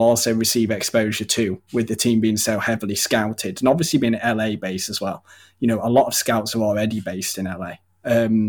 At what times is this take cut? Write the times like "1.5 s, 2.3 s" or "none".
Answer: none

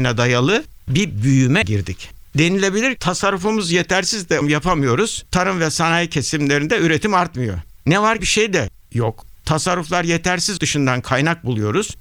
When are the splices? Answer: 1.6 s, 3.0 s, 4.4 s, 5.3 s, 8.2 s, 10.6 s

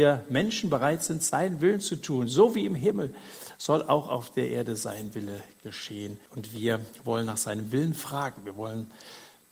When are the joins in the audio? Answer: 6.3 s

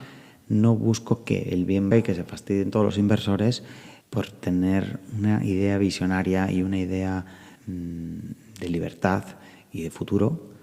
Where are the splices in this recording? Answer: 1.9 s, 4.0 s, 7.6 s

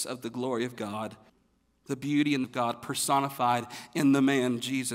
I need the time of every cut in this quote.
1.3 s, 2.4 s

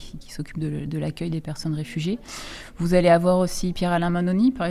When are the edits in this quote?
none

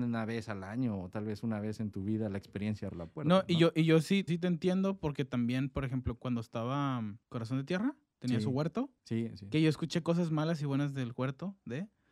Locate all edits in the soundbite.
2.9 s, 4.3 s, 6.2 s, 7.2 s, 9.0 s

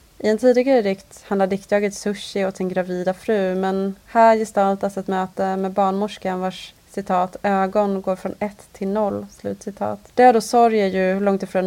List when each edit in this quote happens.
10.1 s

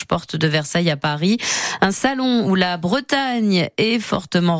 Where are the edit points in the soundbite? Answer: none

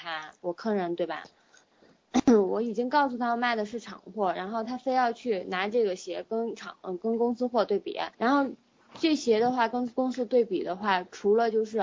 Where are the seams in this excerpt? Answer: 8.1 s

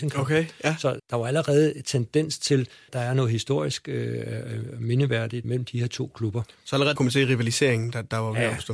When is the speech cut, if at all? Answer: 1.0 s, 2.9 s, 5.4 s, 7.0 s

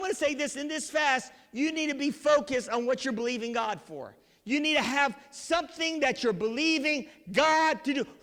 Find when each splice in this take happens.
none

